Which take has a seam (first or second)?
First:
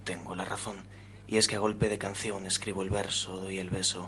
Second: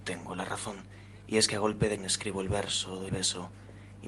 second